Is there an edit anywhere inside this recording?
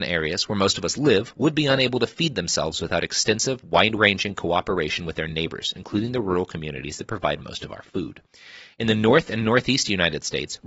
no; 0 cuts

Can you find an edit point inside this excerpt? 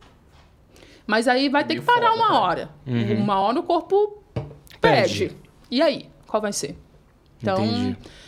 no; 0 cuts

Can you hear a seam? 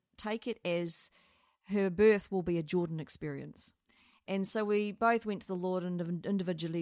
no; 0 cuts

